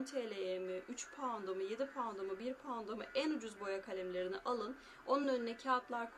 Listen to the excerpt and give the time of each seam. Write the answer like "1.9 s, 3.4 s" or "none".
none